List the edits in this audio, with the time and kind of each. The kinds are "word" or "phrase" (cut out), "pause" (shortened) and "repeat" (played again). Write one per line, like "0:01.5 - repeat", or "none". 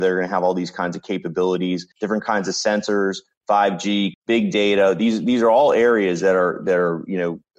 0:01.9 - pause
0:04.1 - word